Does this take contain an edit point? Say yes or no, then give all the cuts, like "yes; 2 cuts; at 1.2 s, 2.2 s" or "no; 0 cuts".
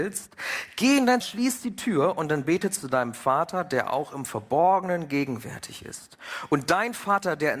yes; 1 cut; at 1.2 s